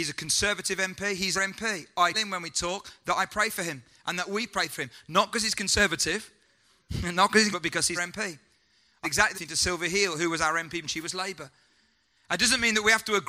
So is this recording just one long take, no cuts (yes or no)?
no